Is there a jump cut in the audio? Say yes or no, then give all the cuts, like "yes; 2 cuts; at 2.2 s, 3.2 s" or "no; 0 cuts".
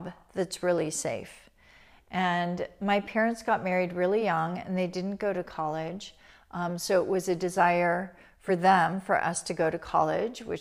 no; 0 cuts